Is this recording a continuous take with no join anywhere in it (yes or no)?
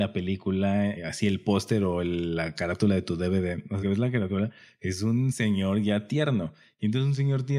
no